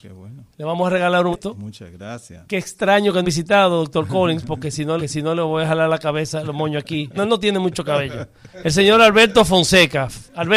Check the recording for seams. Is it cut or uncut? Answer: cut